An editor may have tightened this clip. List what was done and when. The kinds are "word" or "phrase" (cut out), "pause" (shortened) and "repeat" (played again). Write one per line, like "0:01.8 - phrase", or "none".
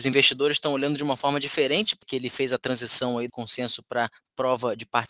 0:02.0 - phrase
0:03.3 - phrase